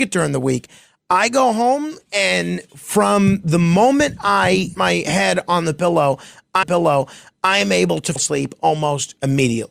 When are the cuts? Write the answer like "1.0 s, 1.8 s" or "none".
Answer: 4.7 s, 6.6 s, 8.2 s